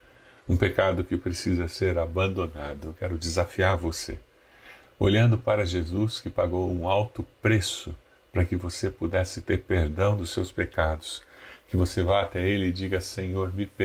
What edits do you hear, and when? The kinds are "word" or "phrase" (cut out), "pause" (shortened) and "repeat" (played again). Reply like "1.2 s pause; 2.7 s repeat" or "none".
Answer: none

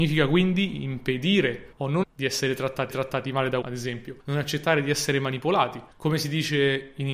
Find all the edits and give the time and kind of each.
1.7 s pause; 2.0 s word; 2.9 s repeat; 3.6 s word; 4.2 s pause; 5.9 s pause

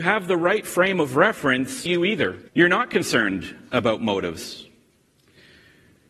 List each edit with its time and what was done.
1.9 s phrase; 2.5 s pause

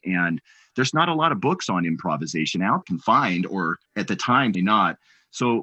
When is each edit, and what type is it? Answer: 2.8 s phrase; 3.9 s pause; 4.5 s word

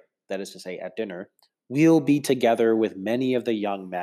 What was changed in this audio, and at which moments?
none

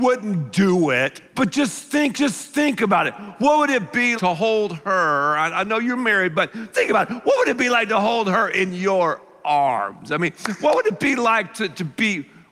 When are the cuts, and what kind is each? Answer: 1.3 s pause; 2.1 s repeat; 4.2 s word; 6.7 s word

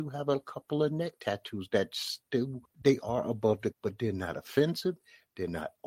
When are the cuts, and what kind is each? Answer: 2.6 s pause; 3.7 s word

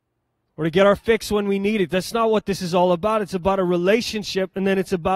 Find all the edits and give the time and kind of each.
none

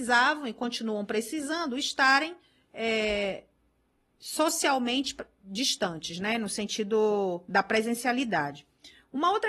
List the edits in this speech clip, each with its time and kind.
none

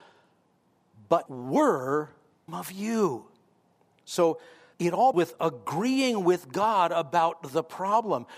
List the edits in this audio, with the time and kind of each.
1.3 s word; 2.5 s word; 4.7 s word; 5.1 s word

